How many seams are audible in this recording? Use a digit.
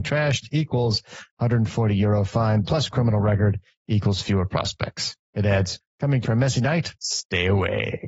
2